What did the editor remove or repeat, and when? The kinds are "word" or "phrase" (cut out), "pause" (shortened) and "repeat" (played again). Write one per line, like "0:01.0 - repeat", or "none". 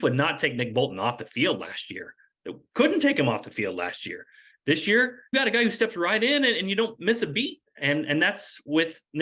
0:05.3 - word